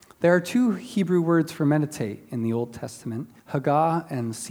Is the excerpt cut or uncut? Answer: cut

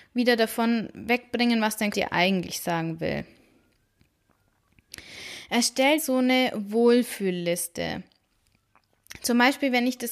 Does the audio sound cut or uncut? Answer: cut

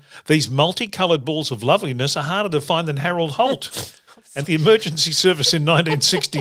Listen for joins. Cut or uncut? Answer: cut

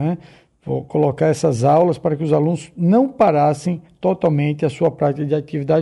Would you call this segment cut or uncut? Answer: uncut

